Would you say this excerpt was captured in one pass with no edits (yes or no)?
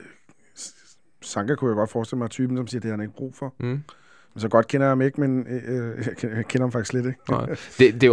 yes